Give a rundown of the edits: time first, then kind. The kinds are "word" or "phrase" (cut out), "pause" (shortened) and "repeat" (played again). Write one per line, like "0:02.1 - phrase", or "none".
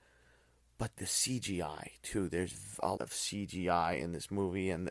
0:00.9 - word
0:03.0 - word